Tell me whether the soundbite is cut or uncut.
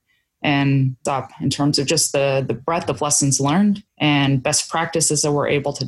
cut